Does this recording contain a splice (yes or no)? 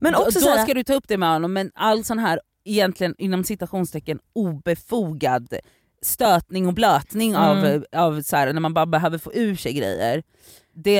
no